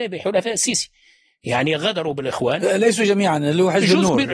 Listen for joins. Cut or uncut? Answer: uncut